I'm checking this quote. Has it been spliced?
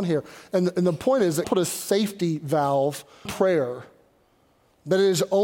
yes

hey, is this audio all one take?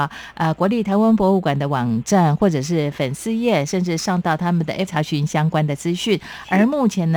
no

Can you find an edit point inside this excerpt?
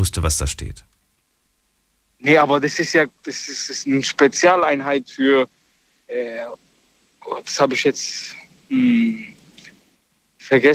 no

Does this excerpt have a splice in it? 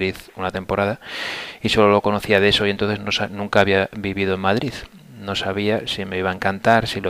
no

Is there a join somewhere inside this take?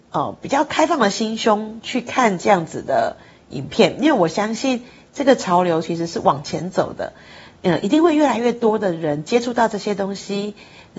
no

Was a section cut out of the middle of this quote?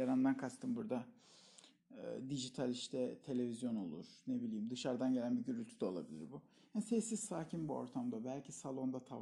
no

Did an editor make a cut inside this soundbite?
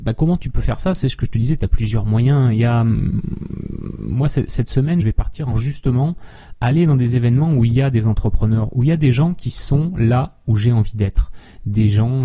yes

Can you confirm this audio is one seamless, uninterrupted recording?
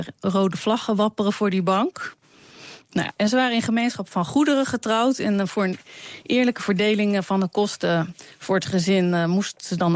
yes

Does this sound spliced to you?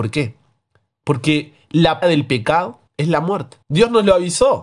yes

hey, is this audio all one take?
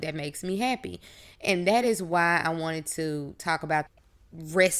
yes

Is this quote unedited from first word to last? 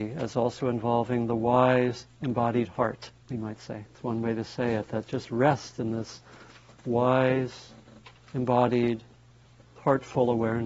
no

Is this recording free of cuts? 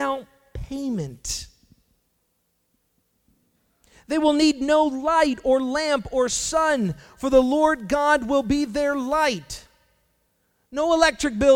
yes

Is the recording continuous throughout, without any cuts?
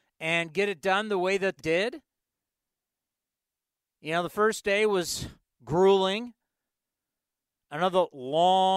no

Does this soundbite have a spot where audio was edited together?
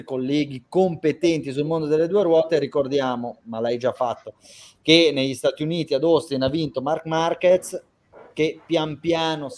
no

